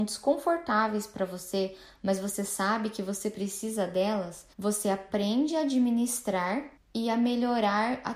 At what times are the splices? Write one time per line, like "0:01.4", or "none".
0:04.5
0:06.8